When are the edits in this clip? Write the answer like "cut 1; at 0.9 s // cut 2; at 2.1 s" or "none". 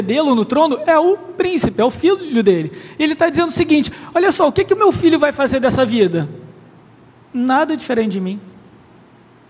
none